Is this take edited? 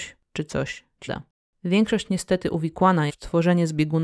yes; 2 cuts; at 1.1 s, 3.1 s

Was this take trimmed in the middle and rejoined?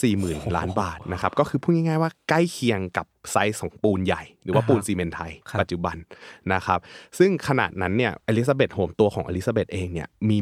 yes; 1 cut; at 8.2 s

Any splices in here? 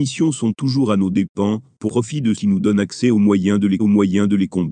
yes; 3 cuts; at 1.9 s, 2.3 s, 3.8 s

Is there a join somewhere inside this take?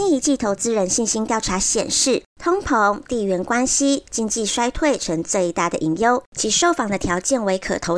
yes; 2 cuts; at 2.3 s, 6.3 s

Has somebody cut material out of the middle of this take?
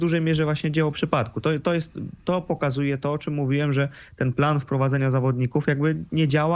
yes; 1 cut; at 2.2 s

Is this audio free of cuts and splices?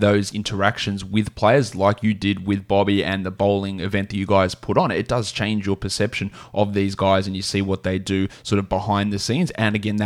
yes; 0 cuts

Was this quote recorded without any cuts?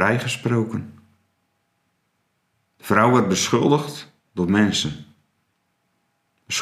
yes; 0 cuts

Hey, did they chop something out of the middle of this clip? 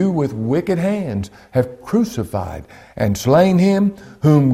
no; 0 cuts

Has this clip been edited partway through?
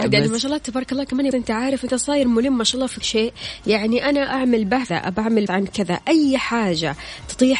yes; 5 cuts; at 1.3 s, 3.0 s, 4.3 s, 4.9 s, 5.5 s

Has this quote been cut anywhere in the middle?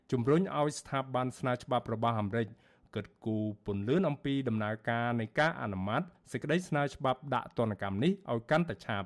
no; 0 cuts

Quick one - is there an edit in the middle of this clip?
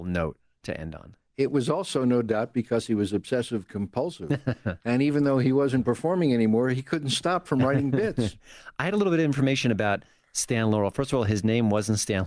no; 0 cuts

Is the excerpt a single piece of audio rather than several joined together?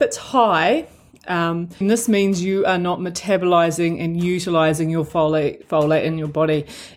no; 1 cut; at 1.8 s

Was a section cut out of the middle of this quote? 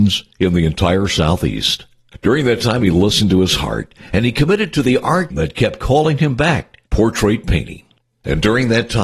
yes; 1 cut; at 6.8 s

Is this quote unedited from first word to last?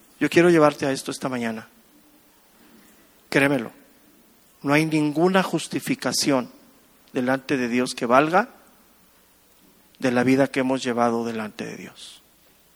yes; 0 cuts

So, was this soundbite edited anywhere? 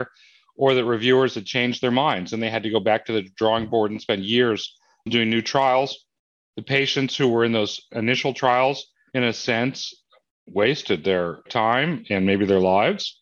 yes; 1 cut; at 12.0 s

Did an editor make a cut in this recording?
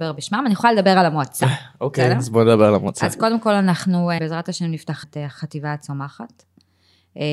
yes; 2 cuts; at 4.2 s, 5.0 s

